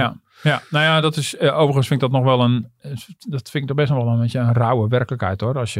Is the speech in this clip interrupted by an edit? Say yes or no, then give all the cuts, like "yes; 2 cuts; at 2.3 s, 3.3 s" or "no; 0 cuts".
no; 0 cuts